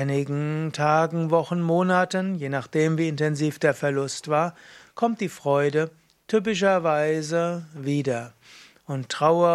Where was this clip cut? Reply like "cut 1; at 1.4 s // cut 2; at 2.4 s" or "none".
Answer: none